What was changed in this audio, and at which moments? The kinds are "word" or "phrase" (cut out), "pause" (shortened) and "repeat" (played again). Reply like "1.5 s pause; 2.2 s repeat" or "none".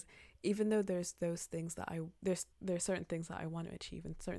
2.5 s pause